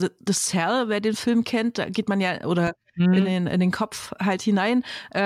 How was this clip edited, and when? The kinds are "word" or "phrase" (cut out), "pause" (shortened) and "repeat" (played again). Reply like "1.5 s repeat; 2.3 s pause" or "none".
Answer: none